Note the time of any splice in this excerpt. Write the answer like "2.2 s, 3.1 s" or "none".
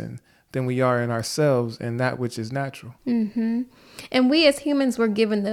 3.0 s